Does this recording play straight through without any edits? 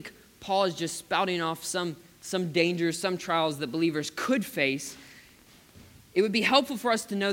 yes; 0 cuts

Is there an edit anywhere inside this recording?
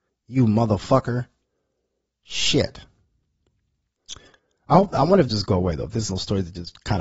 yes; 2 cuts; at 5.3 s, 6.1 s

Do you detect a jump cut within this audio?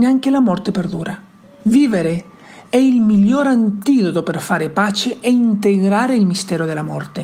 yes; 1 cut; at 1.4 s

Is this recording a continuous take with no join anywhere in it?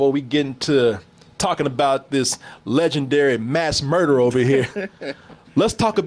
yes; 0 cuts

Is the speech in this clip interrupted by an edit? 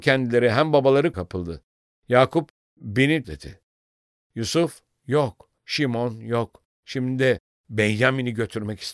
yes; 3 cuts; at 1.1 s, 3.2 s, 5.6 s

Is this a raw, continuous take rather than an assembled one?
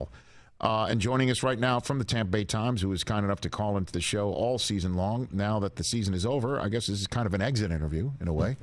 yes; 0 cuts

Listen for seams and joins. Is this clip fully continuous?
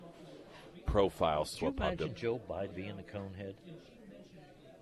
no; 2 cuts; at 1.6 s, 2.7 s

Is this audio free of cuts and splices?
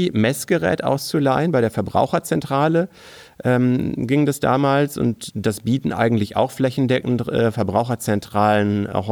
yes; 0 cuts

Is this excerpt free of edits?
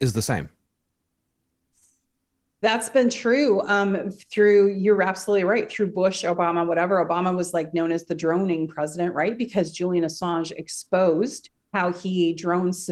yes; 0 cuts

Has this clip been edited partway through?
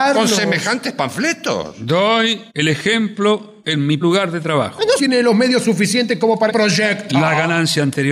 yes; 5 cuts; at 2.5 s, 3.6 s, 4.0 s, 5.0 s, 6.5 s

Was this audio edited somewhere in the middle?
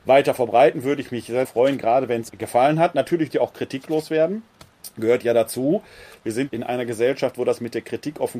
yes; 4 cuts; at 1.4 s, 2.3 s, 3.3 s, 6.5 s

